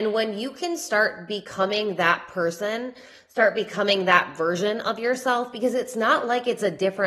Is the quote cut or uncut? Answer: uncut